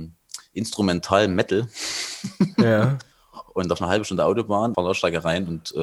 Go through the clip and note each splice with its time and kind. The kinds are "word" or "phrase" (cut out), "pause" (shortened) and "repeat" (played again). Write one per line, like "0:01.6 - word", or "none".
0:03.1 - pause
0:03.8 - word
0:04.7 - phrase